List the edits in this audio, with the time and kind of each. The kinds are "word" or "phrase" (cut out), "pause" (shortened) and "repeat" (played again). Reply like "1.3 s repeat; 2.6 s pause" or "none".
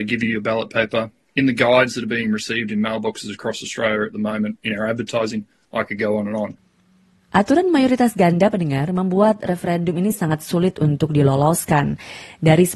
none